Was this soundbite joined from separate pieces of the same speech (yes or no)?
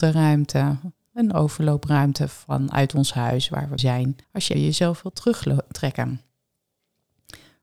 yes